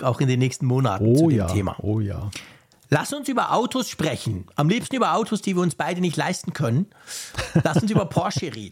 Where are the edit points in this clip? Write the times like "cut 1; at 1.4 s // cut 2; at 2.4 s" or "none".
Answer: none